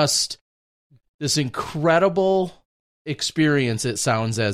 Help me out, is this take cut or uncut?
uncut